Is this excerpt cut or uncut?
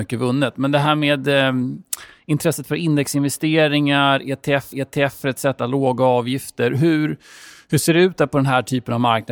cut